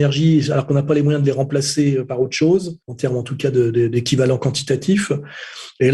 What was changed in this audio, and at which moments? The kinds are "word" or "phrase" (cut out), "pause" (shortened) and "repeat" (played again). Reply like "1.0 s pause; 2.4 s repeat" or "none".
2.8 s pause